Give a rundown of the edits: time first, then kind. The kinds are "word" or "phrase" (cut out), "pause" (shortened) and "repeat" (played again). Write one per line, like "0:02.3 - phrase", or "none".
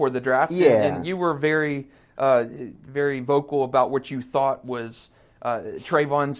none